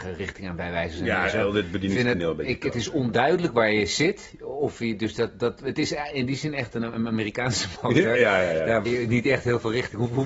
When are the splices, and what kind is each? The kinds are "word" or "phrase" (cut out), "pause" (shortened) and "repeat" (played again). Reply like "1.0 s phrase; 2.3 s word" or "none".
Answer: 8.8 s word